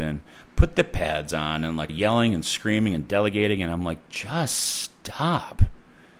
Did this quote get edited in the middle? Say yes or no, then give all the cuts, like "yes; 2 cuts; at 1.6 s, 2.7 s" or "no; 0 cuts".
yes; 1 cut; at 1.9 s